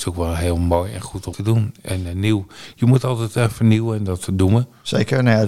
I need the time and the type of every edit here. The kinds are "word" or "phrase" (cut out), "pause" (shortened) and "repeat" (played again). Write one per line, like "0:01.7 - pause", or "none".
0:01.3 - word

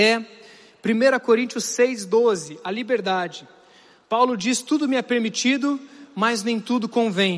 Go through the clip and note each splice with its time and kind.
none

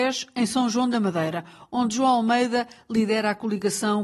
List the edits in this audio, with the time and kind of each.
none

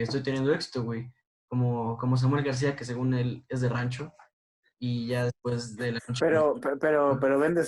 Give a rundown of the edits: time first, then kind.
none

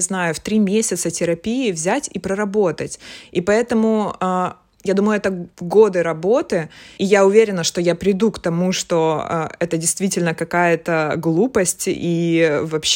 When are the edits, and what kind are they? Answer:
0:05.5 - pause
0:07.0 - word

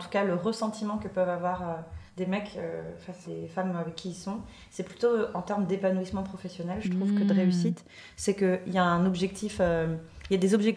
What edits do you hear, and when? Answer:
0:02.1 - pause
0:03.2 - word

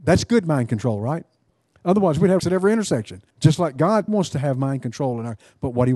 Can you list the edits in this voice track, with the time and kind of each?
0:01.5 - pause
0:02.4 - word
0:03.3 - pause
0:04.1 - phrase

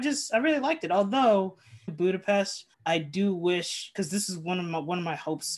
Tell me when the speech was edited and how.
0:01.9 - word
0:02.7 - pause

